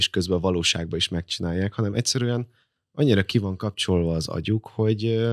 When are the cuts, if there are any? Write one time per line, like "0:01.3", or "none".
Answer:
none